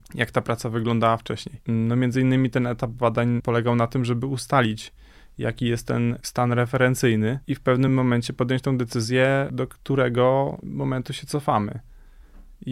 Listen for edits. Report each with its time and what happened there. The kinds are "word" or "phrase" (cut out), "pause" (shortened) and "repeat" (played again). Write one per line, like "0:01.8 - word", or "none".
none